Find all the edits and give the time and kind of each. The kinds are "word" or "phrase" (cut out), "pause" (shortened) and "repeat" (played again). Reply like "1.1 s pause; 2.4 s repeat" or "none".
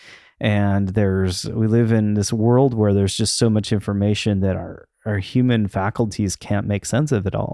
none